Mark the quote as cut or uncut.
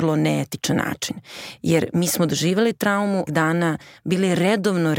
cut